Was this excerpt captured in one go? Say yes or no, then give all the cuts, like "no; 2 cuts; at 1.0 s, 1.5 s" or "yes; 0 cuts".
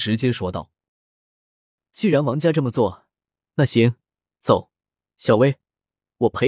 yes; 0 cuts